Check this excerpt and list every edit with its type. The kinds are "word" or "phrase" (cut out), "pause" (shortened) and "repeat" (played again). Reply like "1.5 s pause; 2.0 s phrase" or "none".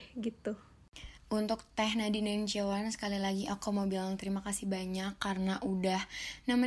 1.2 s pause